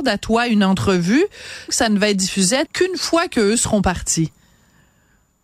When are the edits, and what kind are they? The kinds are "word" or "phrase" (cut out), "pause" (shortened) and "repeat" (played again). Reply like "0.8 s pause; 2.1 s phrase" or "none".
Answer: 1.7 s word; 2.7 s word